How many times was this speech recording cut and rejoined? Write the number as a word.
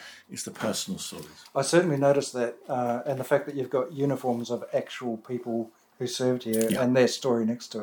zero